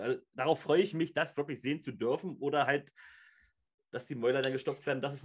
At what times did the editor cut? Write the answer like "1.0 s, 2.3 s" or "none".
none